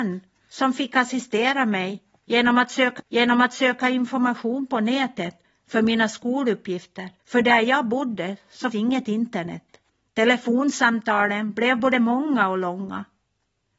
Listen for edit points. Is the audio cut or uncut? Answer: cut